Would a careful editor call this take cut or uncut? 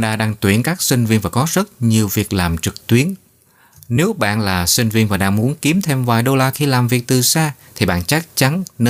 uncut